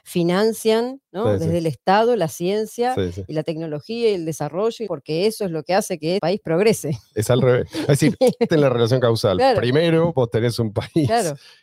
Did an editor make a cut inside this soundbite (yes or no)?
yes